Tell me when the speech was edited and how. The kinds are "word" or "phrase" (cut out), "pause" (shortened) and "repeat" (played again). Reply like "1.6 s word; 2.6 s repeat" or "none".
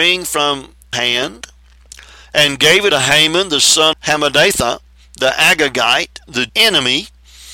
0.9 s word; 2.9 s word; 3.9 s word; 6.5 s word